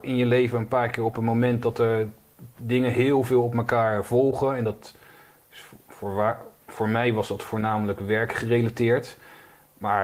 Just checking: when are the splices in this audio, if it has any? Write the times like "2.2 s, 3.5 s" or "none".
none